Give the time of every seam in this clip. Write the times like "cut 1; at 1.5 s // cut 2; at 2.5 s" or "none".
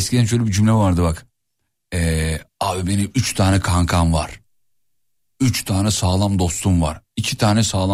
none